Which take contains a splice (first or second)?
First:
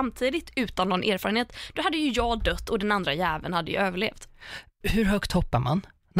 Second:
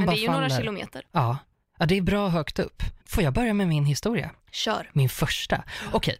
second